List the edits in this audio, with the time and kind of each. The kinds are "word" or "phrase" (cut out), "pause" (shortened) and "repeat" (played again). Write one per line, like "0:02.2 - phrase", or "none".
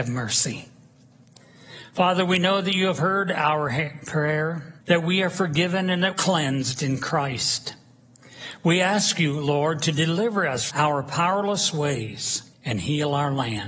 0:04.8 - pause
0:06.1 - phrase
0:10.7 - word
0:12.5 - pause